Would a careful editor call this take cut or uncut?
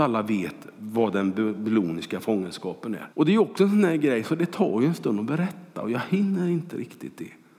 cut